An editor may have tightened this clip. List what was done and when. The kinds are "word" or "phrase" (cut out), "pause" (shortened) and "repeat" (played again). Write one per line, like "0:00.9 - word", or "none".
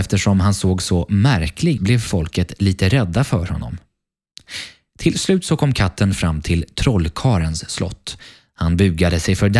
0:01.8 - word